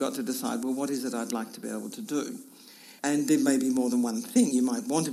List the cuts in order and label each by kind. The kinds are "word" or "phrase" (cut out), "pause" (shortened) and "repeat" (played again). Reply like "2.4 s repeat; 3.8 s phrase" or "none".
3.0 s pause